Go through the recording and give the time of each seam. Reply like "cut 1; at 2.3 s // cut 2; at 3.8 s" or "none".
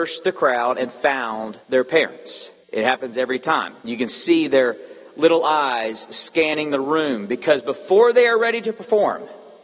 cut 1; at 1.6 s // cut 2; at 2.6 s // cut 3; at 3.8 s